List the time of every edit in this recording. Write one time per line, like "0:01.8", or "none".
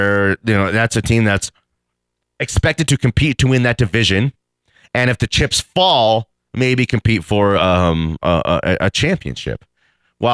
none